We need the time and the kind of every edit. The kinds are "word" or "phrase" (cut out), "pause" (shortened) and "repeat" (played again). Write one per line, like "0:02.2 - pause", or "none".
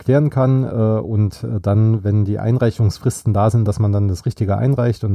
none